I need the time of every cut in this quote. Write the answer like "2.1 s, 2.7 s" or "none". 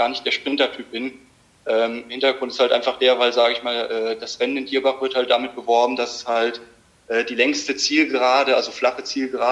none